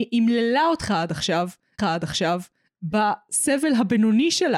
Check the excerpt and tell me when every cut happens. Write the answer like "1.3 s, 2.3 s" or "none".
1.8 s